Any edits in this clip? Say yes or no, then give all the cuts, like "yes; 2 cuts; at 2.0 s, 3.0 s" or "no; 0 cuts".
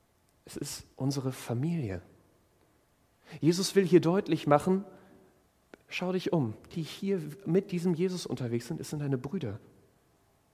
yes; 1 cut; at 6.7 s